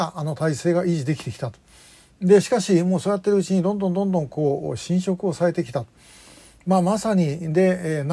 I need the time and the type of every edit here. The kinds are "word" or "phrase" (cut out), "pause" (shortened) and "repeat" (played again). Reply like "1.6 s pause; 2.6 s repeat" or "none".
none